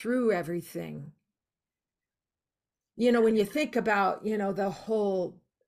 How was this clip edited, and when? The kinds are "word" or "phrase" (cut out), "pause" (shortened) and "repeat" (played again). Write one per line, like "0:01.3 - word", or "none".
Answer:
none